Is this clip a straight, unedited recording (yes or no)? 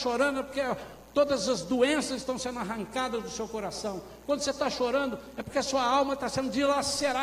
yes